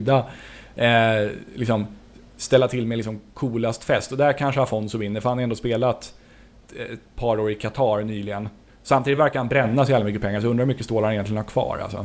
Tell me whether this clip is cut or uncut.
uncut